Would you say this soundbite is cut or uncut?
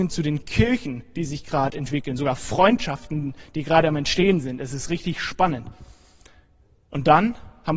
uncut